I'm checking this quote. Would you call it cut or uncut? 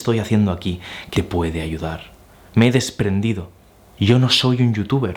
cut